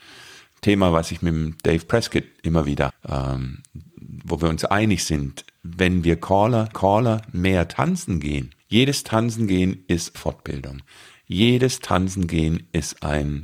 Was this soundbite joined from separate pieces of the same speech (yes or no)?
yes